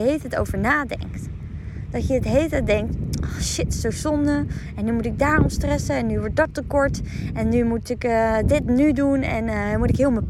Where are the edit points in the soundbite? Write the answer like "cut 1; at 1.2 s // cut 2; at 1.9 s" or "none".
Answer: none